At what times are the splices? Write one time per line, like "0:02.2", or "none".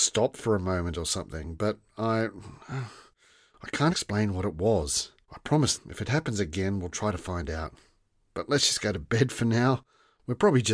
0:03.9
0:05.2
0:05.7